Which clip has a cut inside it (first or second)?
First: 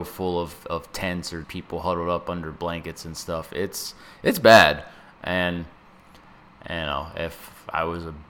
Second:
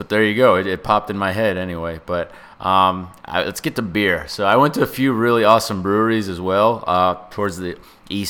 first